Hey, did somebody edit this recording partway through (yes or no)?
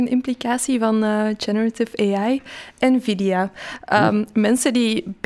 no